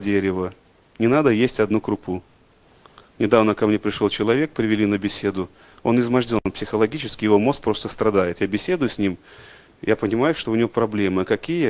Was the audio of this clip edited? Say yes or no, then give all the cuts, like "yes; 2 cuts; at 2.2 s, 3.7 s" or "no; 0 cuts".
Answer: no; 0 cuts